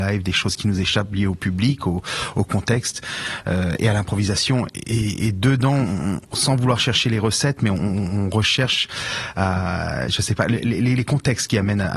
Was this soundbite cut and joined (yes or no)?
no